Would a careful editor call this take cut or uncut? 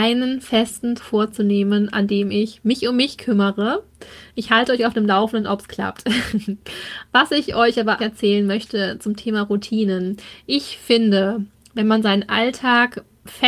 cut